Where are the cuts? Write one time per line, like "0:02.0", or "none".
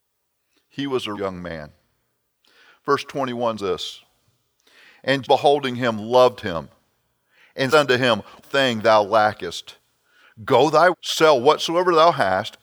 0:01.1
0:03.6
0:05.2
0:07.7
0:08.4
0:10.9